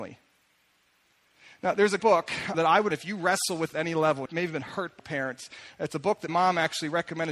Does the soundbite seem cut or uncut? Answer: cut